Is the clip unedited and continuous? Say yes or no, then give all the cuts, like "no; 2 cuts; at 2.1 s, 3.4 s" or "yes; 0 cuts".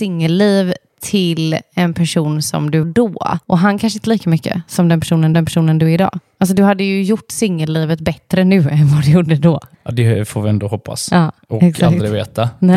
no; 5 cuts; at 2.8 s, 3.4 s, 4.0 s, 5.3 s, 9.7 s